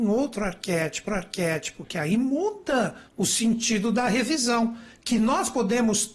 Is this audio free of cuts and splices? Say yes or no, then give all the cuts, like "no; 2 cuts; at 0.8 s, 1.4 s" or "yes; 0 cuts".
no; 2 cuts; at 1.1 s, 3.1 s